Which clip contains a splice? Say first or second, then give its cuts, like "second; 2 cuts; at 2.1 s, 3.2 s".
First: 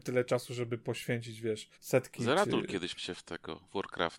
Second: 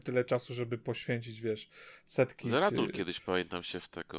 first; 2 cuts; at 1.7 s, 3.0 s